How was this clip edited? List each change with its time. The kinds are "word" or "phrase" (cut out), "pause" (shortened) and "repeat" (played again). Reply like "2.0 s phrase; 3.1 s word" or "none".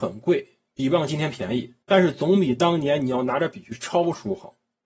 1.8 s pause